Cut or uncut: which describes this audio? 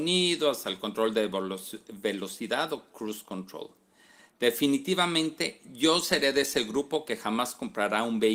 uncut